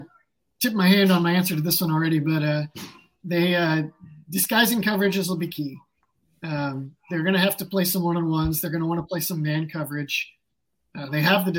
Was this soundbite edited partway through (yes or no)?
no